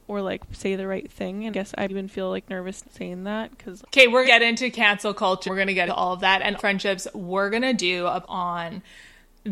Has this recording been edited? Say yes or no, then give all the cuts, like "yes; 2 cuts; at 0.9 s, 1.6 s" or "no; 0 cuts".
yes; 9 cuts; at 1.5 s, 1.9 s, 2.8 s, 3.8 s, 4.2 s, 5.5 s, 5.9 s, 6.6 s, 8.2 s